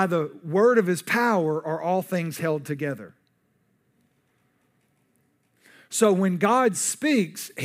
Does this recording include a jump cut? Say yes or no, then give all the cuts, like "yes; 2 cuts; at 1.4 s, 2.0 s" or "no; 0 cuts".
no; 0 cuts